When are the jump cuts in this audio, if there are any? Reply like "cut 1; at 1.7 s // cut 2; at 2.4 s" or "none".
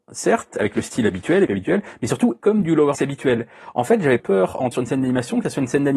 cut 1; at 1.5 s // cut 2; at 2.4 s // cut 3; at 2.9 s // cut 4; at 4.2 s // cut 5; at 4.7 s